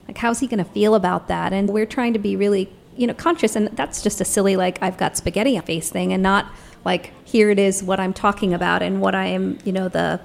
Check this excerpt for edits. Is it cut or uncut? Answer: cut